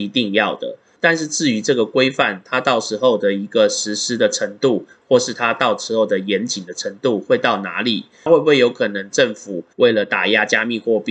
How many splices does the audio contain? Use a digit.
1